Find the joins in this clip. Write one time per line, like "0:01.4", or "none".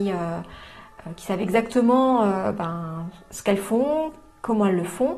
none